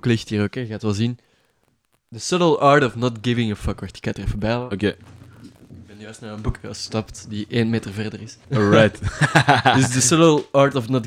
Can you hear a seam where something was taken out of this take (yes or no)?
yes